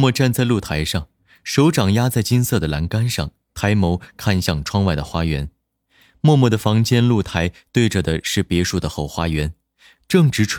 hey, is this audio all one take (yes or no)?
yes